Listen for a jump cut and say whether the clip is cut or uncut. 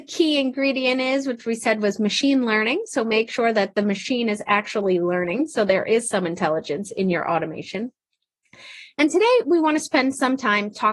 uncut